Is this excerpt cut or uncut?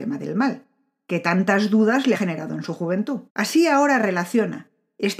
cut